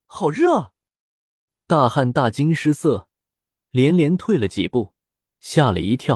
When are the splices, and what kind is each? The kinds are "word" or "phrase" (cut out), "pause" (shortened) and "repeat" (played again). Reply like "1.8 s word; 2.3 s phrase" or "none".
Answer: none

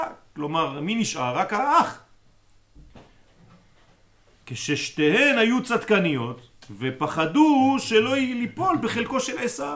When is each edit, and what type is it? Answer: none

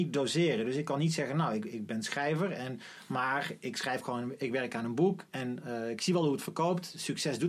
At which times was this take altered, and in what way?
none

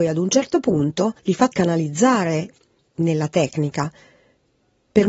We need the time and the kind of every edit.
1.2 s pause; 1.5 s word; 2.8 s word

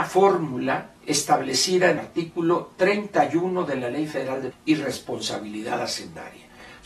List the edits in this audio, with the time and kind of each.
1.0 s pause; 2.0 s word; 4.5 s word

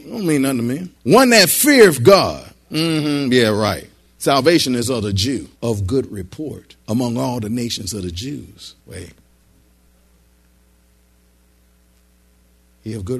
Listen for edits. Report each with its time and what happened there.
1.0 s pause; 4.0 s pause; 5.6 s pause; 6.8 s pause; 8.8 s pause

